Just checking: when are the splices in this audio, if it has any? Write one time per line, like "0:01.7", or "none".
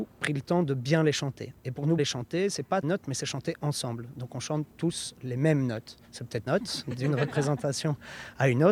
0:02.0
0:02.8
0:04.7
0:06.0
0:06.5